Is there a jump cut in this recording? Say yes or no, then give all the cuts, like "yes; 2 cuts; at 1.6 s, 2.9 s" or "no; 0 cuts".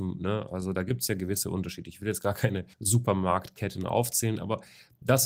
yes; 1 cut; at 2.7 s